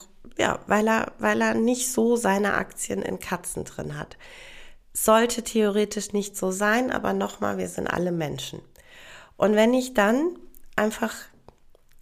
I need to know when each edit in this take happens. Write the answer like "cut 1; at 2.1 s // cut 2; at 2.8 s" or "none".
none